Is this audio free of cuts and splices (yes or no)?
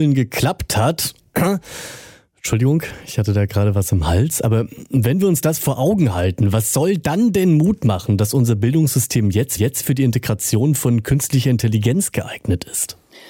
no